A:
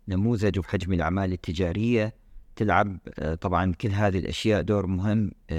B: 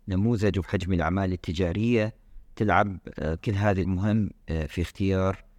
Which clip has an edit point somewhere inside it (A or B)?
B